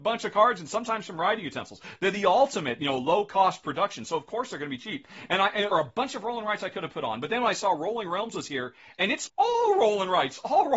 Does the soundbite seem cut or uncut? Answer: cut